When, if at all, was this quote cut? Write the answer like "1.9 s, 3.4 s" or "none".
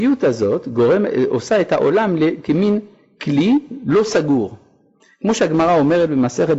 none